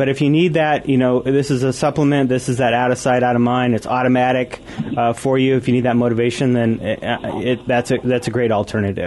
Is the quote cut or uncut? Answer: uncut